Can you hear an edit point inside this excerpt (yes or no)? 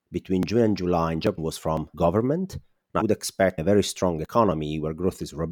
yes